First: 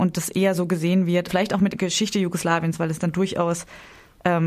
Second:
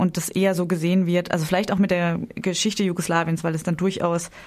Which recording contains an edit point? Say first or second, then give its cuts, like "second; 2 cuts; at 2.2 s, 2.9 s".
first; 2 cuts; at 1.3 s, 1.7 s